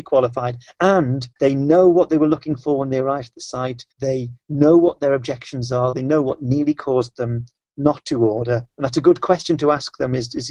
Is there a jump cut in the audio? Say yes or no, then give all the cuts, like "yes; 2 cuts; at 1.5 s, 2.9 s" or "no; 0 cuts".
yes; 2 cuts; at 1.3 s, 3.9 s